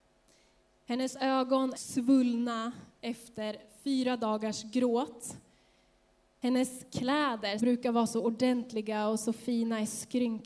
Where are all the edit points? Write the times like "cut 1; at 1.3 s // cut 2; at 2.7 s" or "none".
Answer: cut 1; at 1.8 s // cut 2; at 7.6 s